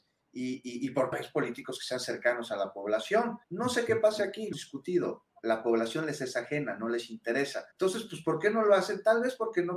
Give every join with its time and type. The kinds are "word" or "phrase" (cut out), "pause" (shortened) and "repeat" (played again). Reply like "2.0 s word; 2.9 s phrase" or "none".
1.1 s word; 3.4 s pause; 4.5 s word; 7.7 s pause